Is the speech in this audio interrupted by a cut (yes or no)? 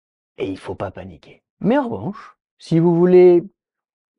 yes